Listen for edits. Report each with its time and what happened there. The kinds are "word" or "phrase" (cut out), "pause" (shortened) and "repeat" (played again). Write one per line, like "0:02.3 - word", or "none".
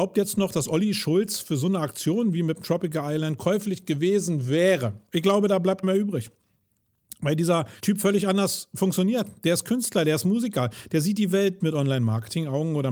0:05.1 - pause
0:05.8 - word
0:07.8 - pause
0:11.6 - word